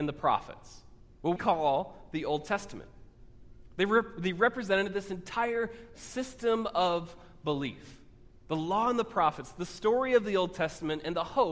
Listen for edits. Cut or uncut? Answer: cut